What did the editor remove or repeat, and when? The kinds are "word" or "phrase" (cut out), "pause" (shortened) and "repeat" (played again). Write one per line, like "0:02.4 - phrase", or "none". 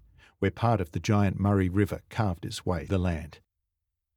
0:02.9 - word